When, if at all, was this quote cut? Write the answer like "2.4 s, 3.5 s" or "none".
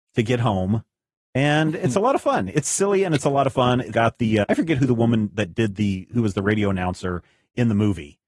3.9 s, 4.4 s